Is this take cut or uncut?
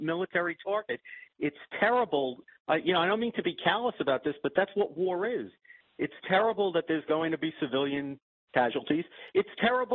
uncut